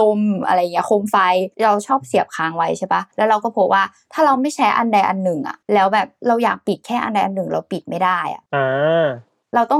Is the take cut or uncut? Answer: cut